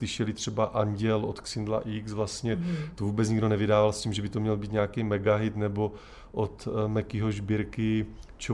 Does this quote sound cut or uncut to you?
uncut